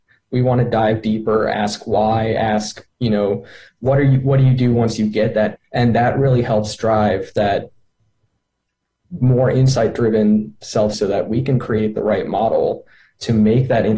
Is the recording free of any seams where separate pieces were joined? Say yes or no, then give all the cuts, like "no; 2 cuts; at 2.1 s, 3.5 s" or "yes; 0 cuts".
no; 2 cuts; at 5.6 s, 10.9 s